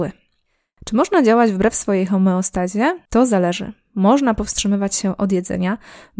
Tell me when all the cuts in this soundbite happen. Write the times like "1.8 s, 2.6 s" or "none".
3.1 s